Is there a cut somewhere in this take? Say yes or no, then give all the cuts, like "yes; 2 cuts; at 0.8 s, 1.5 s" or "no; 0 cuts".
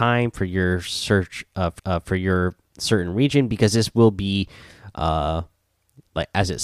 yes; 1 cut; at 1.8 s